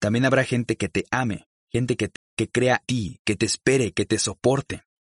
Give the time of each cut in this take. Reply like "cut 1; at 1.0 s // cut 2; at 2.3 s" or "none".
cut 1; at 1.6 s // cut 2; at 2.2 s // cut 3; at 2.8 s